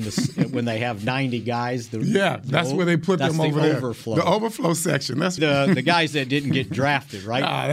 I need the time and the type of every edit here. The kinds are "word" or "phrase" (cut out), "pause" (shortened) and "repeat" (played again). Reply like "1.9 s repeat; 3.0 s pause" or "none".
5.4 s word